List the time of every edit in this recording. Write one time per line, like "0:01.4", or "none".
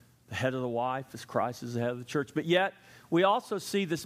none